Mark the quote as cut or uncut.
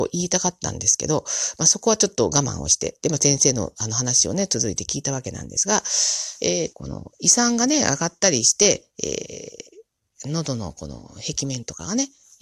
cut